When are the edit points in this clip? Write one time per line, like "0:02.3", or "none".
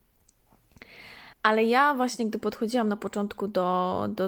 0:01.3

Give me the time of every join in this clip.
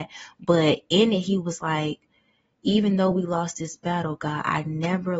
none

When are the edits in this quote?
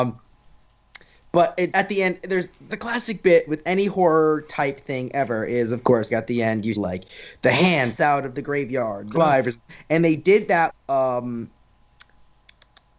0:01.7
0:02.7
0:03.5
0:06.1
0:06.8
0:07.9
0:09.2
0:10.7

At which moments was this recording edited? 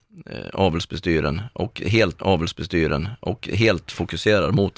0:02.2

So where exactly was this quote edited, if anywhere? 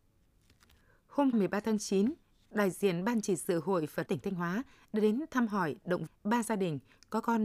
0:01.3
0:04.1
0:06.1

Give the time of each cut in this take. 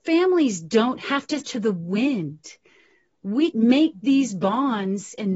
0:01.4
0:03.5

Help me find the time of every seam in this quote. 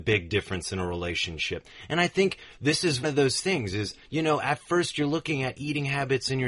0:03.0
0:04.0

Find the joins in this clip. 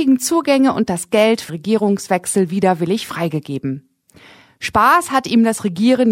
0:01.5

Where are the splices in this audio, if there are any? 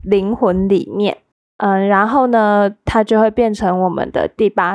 0:01.3

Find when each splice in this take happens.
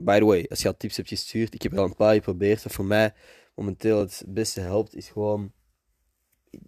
none

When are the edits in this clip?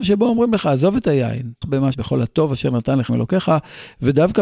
0:01.6
0:01.9
0:03.1

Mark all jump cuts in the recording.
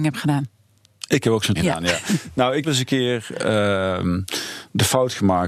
0:01.5
0:02.6

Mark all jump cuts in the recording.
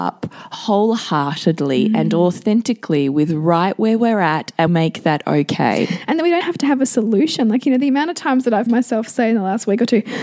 0:04.7
0:06.4
0:08.7

